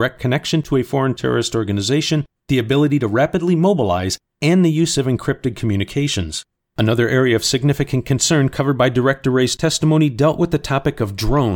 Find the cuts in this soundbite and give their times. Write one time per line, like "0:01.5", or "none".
none